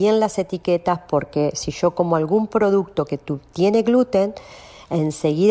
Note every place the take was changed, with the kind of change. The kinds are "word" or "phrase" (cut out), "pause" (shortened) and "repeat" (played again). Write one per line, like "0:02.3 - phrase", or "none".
none

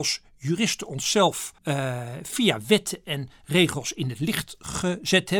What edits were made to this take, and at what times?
0:01.6 - pause

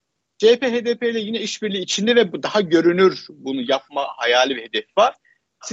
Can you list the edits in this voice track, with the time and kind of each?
none

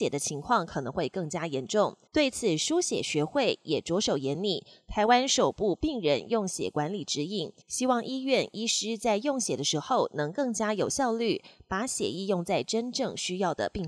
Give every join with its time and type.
0:02.1 - pause
0:07.6 - pause

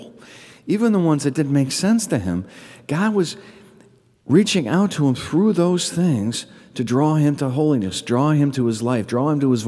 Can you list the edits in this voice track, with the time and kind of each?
none

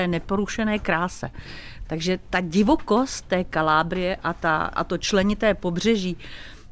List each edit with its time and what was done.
0:04.8 - word

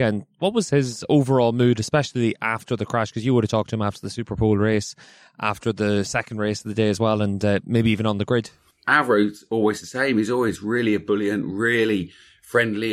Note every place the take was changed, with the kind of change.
none

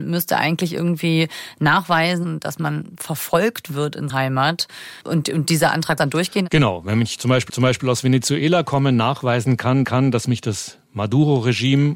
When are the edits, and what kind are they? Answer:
0:04.1 - word
0:05.0 - pause
0:06.0 - word
0:07.5 - repeat
0:09.8 - repeat

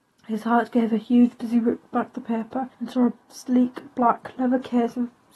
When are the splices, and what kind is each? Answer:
0:01.4 - word
0:02.7 - pause
0:03.2 - pause

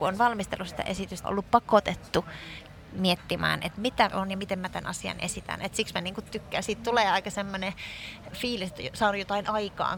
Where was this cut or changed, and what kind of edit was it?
0:01.2 - word
0:04.1 - phrase
0:08.3 - word

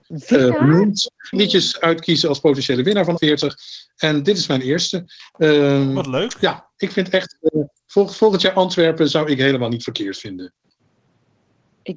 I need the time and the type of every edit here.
0:01.3 - phrase
0:03.2 - word

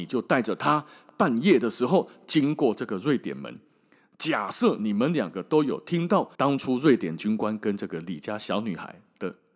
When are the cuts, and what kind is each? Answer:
0:06.3 - pause

